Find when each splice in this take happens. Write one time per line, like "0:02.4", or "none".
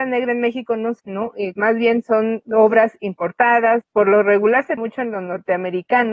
0:01.0
0:01.5
0:02.4
0:03.8
0:04.8